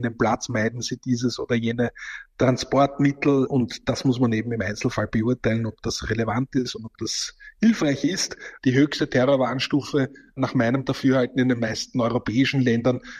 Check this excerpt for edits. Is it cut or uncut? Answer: uncut